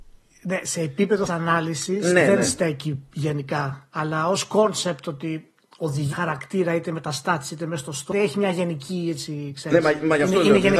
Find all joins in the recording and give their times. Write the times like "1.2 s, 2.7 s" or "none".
1.3 s, 6.1 s, 8.1 s